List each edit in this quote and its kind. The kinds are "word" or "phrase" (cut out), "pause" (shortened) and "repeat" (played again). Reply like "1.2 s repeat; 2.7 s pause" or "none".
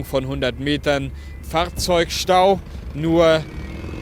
1.4 s word